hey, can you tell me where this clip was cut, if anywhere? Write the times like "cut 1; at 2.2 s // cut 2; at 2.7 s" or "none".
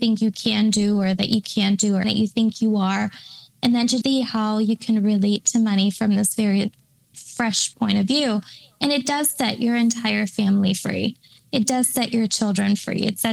cut 1; at 2.0 s // cut 2; at 4.0 s // cut 3; at 7.1 s